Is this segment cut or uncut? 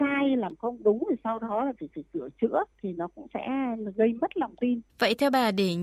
cut